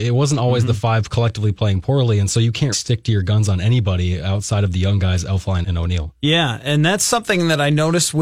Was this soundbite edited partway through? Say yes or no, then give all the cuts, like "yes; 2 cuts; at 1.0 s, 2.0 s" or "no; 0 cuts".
yes; 2 cuts; at 2.7 s, 5.6 s